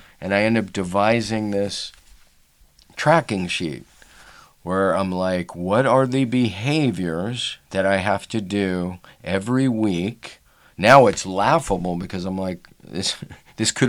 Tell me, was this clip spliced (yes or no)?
no